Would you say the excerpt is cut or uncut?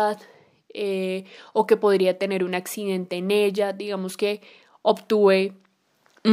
uncut